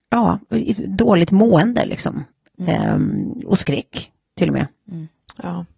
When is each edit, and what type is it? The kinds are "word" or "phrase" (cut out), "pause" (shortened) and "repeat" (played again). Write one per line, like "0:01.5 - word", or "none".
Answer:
none